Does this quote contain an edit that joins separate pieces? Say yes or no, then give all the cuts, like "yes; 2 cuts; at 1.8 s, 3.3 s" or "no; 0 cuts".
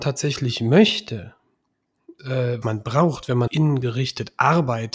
yes; 3 cuts; at 2.2 s, 2.6 s, 3.5 s